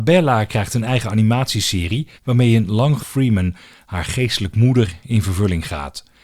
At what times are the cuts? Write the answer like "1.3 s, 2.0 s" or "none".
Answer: 2.1 s, 3.0 s